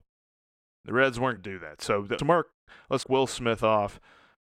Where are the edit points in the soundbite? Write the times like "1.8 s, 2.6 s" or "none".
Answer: 1.4 s, 2.2 s, 3.0 s

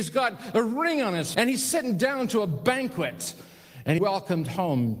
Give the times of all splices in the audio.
1.3 s, 4.0 s

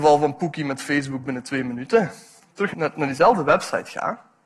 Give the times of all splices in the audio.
2.4 s, 2.7 s

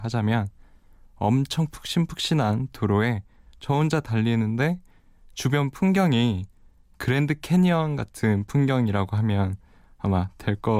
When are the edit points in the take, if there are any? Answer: none

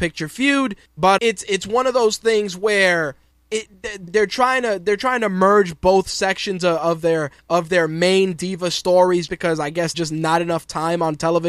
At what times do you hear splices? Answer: 1.2 s, 4.1 s, 9.3 s, 9.9 s

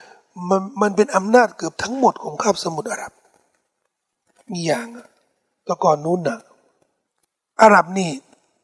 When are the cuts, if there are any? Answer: none

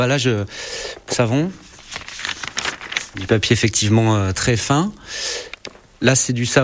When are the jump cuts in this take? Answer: 1.1 s, 4.3 s

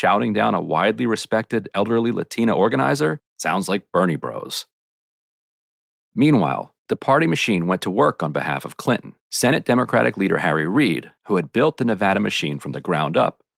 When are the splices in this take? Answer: 3.3 s, 6.8 s, 9.2 s, 11.2 s

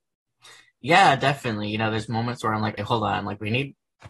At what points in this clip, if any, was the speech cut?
2.8 s

